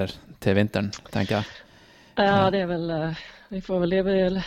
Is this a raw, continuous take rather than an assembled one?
yes; 0 cuts

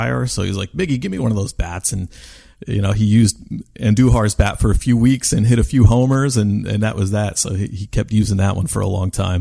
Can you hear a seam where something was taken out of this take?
no; 0 cuts

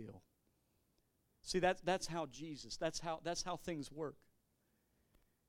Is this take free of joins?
yes; 0 cuts

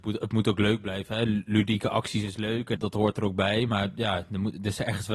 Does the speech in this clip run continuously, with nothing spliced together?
no; 1 cut; at 2.7 s

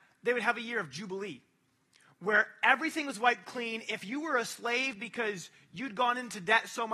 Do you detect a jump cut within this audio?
no; 0 cuts

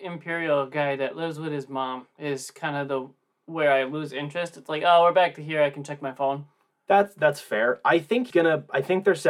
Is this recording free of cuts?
no; 1 cut; at 8.3 s

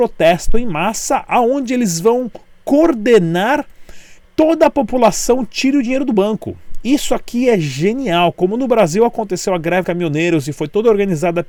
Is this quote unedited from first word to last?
no; 2 cuts; at 4.2 s, 9.8 s

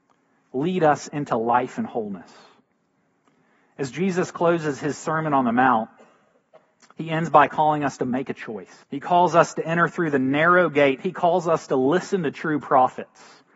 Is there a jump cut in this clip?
yes; 2 cuts; at 6.9 s, 8.8 s

